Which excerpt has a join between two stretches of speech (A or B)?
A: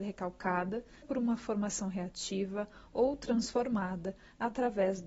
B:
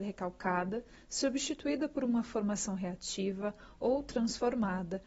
A